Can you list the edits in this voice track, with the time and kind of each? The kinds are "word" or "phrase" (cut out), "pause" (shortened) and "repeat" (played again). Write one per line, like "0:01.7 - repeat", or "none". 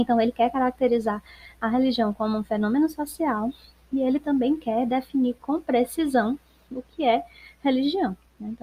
none